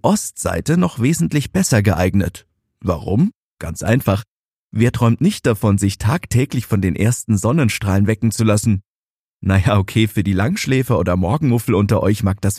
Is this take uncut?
yes; 0 cuts

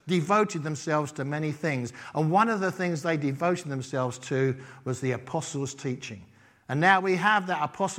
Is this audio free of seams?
yes; 0 cuts

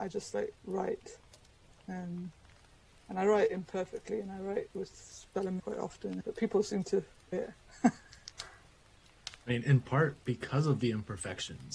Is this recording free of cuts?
no; 2 cuts; at 5.6 s, 7.3 s

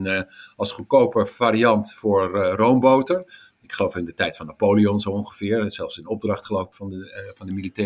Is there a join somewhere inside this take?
no; 0 cuts

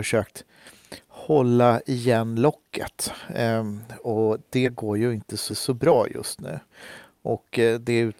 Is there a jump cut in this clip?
yes; 1 cut; at 5.5 s

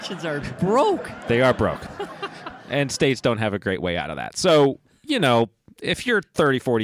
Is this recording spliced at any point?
no; 0 cuts

